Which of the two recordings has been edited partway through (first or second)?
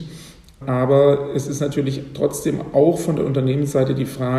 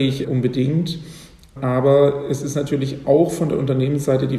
second